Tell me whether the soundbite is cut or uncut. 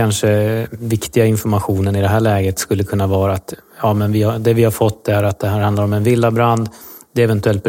uncut